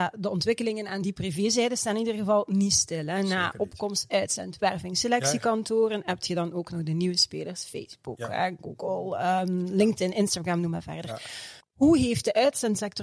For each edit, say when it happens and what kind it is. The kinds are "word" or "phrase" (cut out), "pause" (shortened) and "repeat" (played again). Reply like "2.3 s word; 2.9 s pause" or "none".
11.6 s pause